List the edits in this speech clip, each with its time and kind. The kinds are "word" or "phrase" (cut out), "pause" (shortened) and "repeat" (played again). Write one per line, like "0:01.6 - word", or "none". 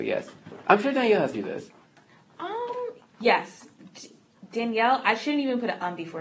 0:01.3 - word